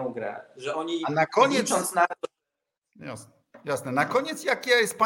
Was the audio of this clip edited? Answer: no; 0 cuts

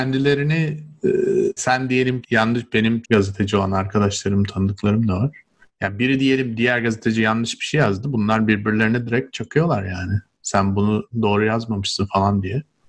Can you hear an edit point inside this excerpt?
yes; 4 cuts; at 1.6 s, 2.2 s, 3.0 s, 5.6 s

